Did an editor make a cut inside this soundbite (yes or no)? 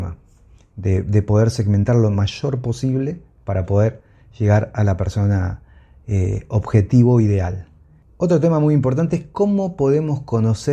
no